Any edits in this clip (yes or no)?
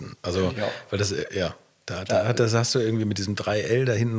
no